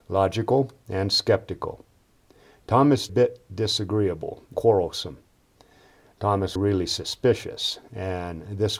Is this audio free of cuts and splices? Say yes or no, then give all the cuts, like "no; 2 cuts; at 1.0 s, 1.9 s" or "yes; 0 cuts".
no; 3 cuts; at 3.1 s, 4.5 s, 6.6 s